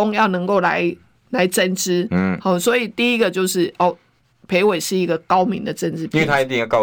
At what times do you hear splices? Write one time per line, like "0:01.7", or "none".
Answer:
none